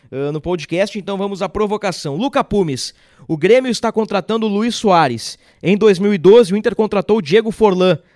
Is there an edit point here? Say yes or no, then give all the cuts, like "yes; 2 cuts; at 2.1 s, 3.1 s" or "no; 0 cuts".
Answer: no; 0 cuts